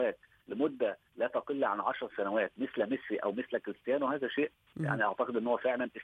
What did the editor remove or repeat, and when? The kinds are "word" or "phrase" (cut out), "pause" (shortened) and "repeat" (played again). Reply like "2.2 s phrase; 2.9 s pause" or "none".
none